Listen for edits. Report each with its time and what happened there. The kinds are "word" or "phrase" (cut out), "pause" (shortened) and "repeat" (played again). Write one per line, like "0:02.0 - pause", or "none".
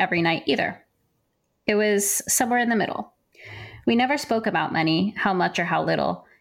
none